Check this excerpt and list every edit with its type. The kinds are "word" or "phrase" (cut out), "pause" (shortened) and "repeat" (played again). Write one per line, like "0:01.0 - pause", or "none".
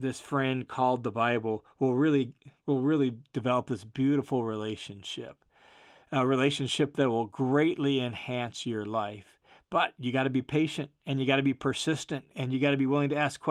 none